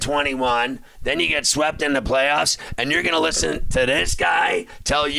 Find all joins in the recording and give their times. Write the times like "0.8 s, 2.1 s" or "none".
none